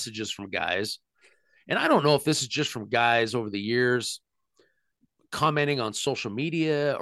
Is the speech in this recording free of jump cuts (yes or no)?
yes